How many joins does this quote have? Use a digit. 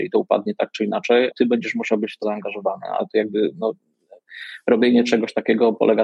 2